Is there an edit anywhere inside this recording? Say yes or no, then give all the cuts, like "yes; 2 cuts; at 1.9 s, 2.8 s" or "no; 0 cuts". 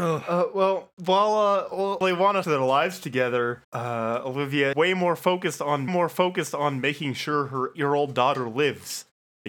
yes; 6 cuts; at 2.0 s, 2.4 s, 3.6 s, 4.7 s, 5.9 s, 7.7 s